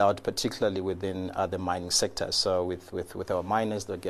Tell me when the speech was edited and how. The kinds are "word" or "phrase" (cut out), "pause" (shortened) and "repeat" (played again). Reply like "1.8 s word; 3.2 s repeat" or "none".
none

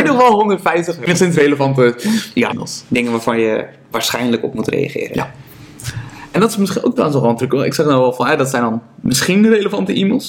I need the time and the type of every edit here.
2.5 s word

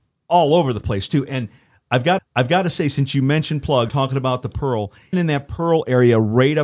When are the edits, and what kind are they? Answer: 2.2 s repeat; 3.9 s phrase; 5.1 s word

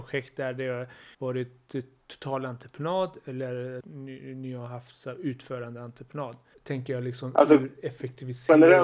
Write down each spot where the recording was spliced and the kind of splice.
1.1 s pause; 3.8 s phrase; 6.5 s pause

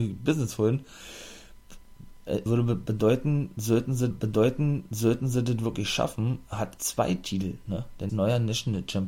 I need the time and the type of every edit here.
2.5 s word; 4.1 s repeat; 6.8 s word; 8.1 s phrase

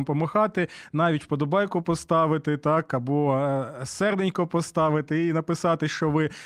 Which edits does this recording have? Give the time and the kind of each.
none

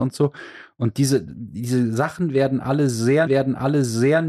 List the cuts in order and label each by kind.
3.3 s repeat

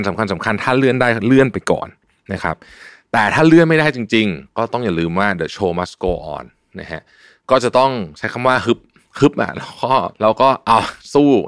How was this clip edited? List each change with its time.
none

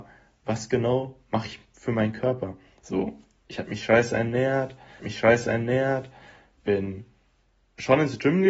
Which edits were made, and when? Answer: 5.0 s repeat

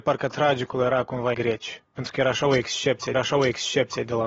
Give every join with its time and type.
1.3 s phrase; 1.8 s pause; 3.1 s repeat

